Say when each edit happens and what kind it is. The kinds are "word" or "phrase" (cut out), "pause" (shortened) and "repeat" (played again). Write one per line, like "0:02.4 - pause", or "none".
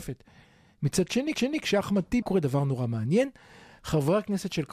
0:01.3 - repeat
0:02.2 - phrase